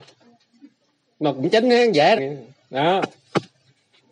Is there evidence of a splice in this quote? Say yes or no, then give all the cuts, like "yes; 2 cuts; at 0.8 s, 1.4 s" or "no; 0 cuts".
yes; 1 cut; at 2.2 s